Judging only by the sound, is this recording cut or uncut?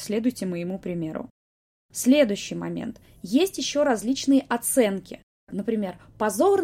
uncut